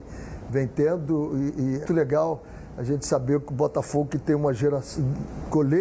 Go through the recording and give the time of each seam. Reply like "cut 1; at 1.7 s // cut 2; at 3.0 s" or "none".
cut 1; at 1.9 s